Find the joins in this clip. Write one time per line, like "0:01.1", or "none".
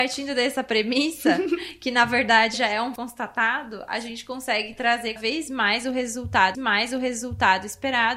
0:02.5
0:03.0
0:05.2
0:06.5

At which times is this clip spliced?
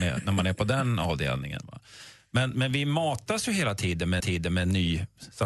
0:04.2

